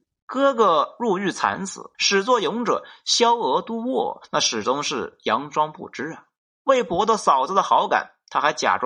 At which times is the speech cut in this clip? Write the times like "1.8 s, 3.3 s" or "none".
1.9 s